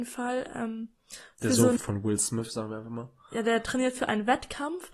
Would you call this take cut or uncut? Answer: cut